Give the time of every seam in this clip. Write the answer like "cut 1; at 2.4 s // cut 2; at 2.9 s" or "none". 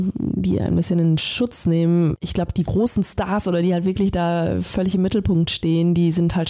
none